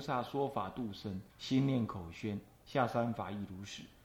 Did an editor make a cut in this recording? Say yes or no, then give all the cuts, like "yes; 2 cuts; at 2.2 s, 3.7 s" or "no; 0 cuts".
yes; 1 cut; at 1.3 s